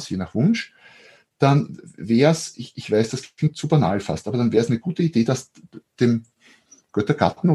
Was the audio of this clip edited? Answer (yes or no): no